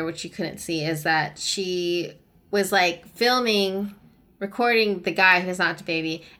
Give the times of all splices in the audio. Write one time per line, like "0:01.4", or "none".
none